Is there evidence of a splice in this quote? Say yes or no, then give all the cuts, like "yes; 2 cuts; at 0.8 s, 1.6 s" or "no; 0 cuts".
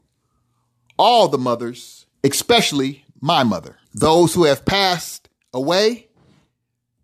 yes; 2 cuts; at 2.1 s, 3.8 s